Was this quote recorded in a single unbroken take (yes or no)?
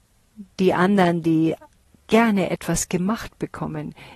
yes